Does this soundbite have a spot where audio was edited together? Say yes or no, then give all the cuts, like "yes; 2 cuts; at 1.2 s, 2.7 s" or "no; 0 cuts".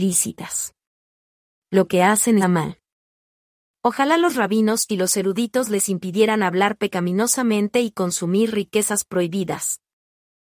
yes; 1 cut; at 2.4 s